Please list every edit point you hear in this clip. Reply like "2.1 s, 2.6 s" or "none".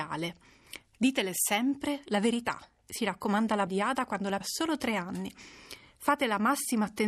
3.7 s, 4.4 s